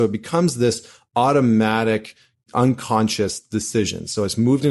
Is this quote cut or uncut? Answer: uncut